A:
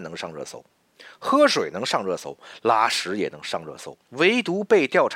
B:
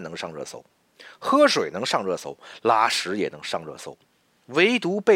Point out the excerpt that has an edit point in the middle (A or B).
A